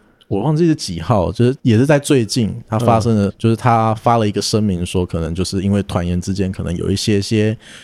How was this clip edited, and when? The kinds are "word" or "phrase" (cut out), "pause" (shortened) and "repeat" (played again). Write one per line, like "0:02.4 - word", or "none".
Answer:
0:01.6 - pause
0:03.3 - word